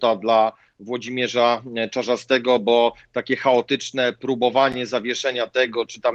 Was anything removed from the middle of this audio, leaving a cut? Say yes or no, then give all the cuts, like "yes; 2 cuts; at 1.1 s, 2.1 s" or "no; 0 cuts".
no; 0 cuts